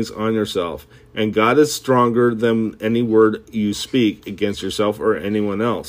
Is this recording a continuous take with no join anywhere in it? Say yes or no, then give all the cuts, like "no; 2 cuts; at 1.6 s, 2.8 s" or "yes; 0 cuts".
yes; 0 cuts